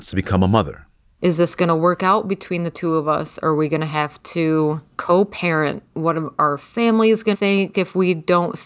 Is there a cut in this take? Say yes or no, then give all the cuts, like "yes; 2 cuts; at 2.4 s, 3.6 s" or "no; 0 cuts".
yes; 4 cuts; at 1.1 s, 4.9 s, 5.9 s, 7.3 s